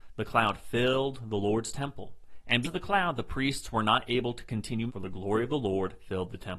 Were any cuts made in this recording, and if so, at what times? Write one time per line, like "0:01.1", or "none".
0:02.6
0:04.9